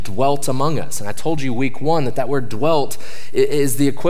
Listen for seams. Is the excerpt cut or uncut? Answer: uncut